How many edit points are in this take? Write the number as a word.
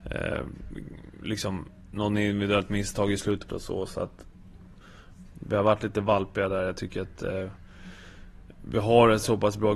one